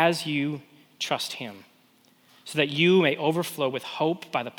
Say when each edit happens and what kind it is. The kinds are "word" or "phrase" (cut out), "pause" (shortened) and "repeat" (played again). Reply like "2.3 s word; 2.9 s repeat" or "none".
none